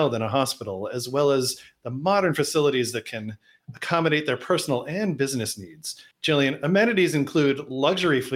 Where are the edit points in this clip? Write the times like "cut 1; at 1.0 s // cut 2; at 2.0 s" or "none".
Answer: cut 1; at 6.1 s